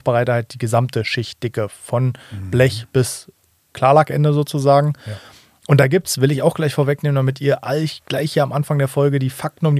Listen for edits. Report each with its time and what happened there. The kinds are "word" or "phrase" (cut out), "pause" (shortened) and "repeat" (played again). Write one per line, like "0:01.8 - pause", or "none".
none